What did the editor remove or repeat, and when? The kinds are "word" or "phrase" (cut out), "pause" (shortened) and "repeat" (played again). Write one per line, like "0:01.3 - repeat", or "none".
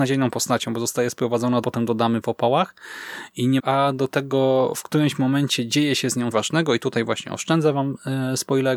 0:01.6 - phrase
0:03.6 - phrase
0:06.3 - word